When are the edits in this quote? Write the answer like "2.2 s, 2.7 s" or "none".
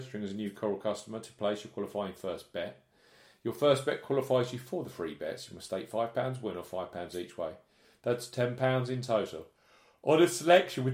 none